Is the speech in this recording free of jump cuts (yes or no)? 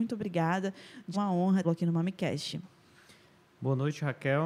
no